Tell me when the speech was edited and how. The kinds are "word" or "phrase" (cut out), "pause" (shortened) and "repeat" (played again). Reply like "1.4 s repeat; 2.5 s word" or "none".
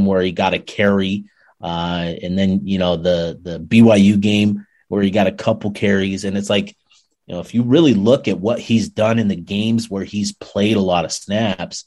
none